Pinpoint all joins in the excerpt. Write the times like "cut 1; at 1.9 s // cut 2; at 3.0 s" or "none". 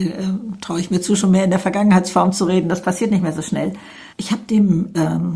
cut 1; at 4.1 s